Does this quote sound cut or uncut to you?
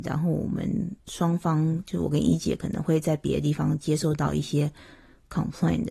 cut